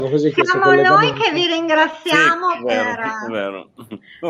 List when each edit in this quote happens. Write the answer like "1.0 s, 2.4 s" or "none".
none